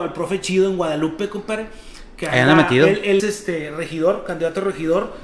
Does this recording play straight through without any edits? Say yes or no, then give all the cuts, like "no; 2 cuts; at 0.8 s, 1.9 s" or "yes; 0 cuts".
no; 1 cut; at 3.2 s